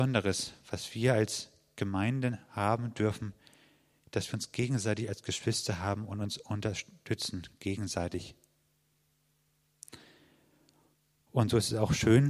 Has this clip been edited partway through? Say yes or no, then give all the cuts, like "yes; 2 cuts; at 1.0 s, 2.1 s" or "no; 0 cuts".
no; 0 cuts